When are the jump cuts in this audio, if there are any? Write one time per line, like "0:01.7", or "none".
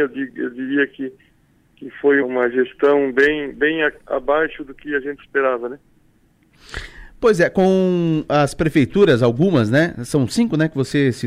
0:02.2
0:04.0